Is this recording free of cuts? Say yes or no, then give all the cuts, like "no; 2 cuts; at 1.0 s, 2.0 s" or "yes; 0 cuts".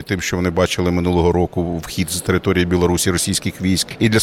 yes; 0 cuts